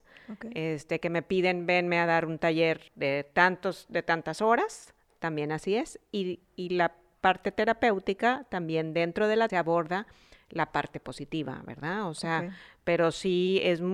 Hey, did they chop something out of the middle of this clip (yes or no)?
yes